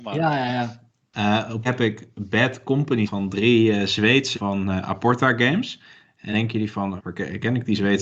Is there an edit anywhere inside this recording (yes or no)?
yes